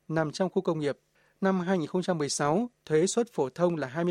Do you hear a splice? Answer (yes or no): no